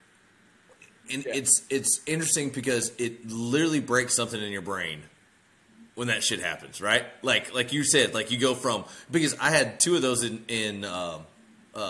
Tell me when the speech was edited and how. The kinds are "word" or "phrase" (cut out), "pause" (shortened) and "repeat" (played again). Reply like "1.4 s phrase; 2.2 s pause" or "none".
5.9 s pause